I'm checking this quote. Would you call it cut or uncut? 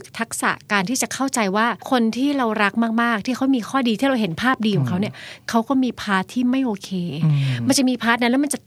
cut